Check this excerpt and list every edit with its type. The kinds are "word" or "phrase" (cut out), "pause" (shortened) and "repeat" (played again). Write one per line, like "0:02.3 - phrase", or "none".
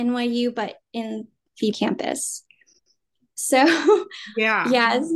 0:01.7 - word